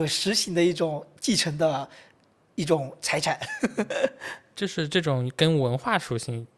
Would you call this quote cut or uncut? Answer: uncut